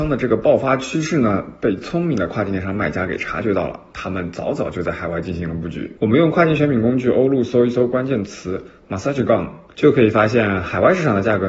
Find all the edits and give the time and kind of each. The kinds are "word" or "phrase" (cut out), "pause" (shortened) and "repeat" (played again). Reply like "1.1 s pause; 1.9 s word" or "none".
6.0 s pause